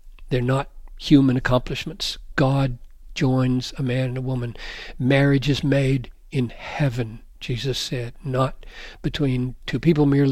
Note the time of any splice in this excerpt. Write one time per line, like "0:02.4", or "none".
none